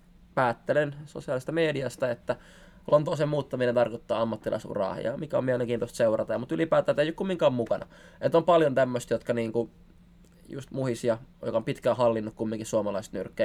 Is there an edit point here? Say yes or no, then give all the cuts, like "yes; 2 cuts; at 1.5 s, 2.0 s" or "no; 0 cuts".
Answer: no; 0 cuts